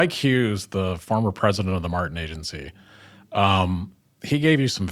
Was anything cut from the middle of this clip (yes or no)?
no